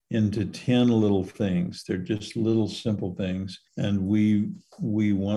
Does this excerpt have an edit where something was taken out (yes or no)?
yes